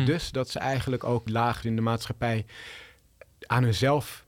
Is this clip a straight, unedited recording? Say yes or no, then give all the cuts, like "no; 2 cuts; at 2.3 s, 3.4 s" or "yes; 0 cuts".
no; 2 cuts; at 1.3 s, 1.6 s